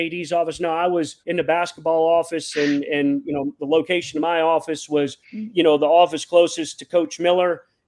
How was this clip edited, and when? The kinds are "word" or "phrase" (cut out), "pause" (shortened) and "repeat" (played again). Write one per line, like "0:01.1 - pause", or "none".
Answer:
0:01.2 - pause
0:05.2 - pause